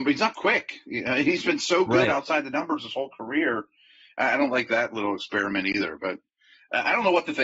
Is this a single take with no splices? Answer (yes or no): yes